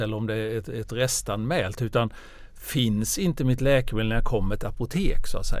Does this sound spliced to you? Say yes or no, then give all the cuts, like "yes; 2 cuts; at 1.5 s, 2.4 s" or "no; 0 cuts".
yes; 1 cut; at 4.6 s